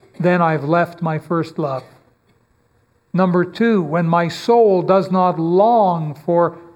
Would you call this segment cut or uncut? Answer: uncut